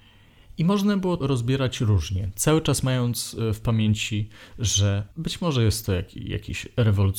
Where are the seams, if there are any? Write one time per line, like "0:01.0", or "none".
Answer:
0:01.2
0:05.1